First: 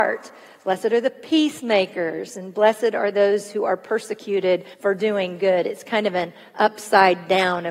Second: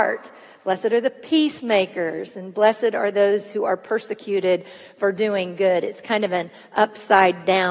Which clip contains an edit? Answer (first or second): first